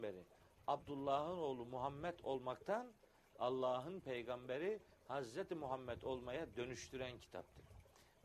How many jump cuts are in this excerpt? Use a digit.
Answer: 0